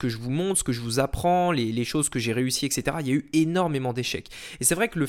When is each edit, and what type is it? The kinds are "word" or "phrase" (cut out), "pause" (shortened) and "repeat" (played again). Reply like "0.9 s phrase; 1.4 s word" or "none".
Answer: none